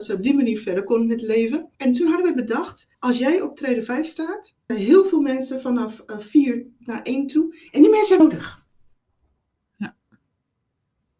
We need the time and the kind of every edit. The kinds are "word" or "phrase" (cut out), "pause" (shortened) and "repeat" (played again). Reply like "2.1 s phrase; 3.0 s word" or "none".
1.7 s pause; 2.9 s pause; 4.7 s word; 8.2 s word